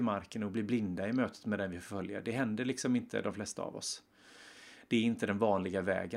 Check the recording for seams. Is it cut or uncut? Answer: uncut